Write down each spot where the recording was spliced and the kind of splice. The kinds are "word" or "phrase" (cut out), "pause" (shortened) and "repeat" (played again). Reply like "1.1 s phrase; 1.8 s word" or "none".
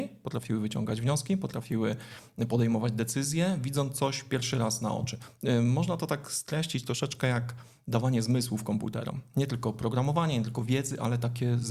none